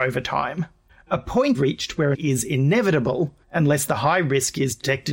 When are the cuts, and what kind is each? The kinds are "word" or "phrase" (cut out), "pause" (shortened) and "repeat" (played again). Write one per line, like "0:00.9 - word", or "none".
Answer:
0:01.5 - word
0:02.1 - word
0:03.4 - pause